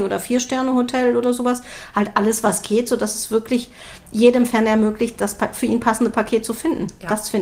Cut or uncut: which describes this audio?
uncut